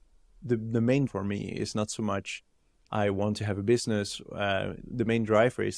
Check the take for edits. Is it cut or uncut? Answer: cut